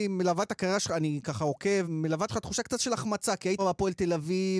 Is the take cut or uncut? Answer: cut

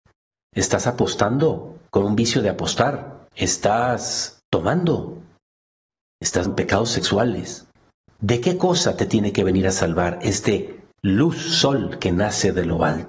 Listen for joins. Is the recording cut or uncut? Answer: cut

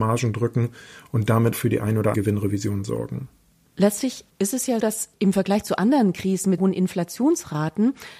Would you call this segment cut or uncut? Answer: cut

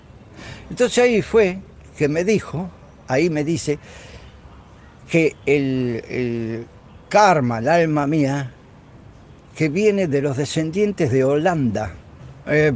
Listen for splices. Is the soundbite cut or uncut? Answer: cut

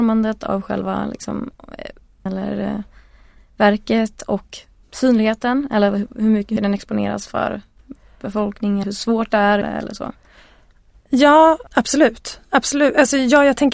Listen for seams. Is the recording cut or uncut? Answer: cut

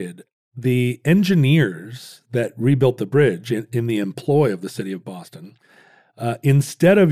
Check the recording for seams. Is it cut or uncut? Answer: uncut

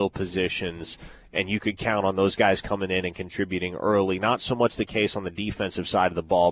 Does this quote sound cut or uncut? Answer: uncut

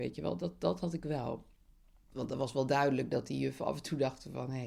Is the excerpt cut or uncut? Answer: uncut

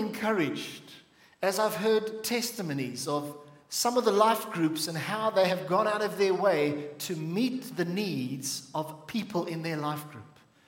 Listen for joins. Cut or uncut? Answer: uncut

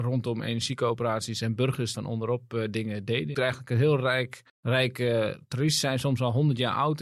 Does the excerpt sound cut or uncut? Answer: cut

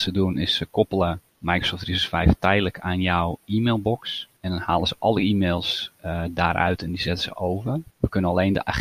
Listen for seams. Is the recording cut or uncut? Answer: cut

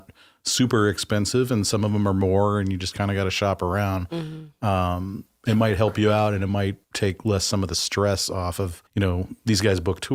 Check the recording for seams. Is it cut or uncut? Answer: cut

